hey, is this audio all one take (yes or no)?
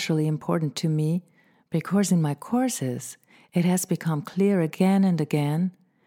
yes